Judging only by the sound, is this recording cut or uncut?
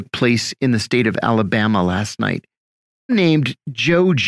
cut